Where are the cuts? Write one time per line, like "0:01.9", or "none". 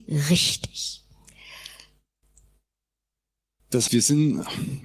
0:03.9